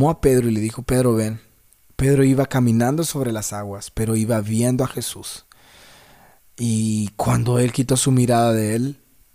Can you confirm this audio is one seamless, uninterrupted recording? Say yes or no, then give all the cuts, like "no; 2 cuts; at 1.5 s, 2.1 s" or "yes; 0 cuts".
yes; 0 cuts